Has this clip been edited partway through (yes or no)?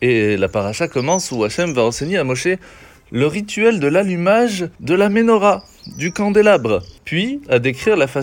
yes